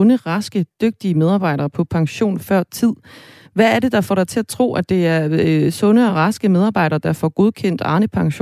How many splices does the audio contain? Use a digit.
0